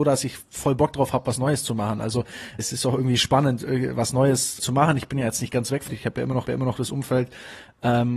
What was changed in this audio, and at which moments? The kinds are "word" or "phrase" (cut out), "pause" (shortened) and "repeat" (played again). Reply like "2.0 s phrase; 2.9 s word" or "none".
2.6 s word; 4.6 s word; 5.9 s word; 6.4 s repeat